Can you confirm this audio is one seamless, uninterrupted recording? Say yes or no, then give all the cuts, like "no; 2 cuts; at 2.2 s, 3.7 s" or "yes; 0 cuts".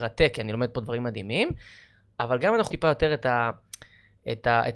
no; 1 cut; at 2.7 s